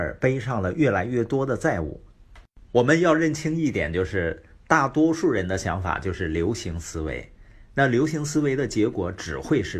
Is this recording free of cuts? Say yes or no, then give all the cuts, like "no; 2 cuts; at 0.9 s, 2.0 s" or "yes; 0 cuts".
no; 1 cut; at 2.7 s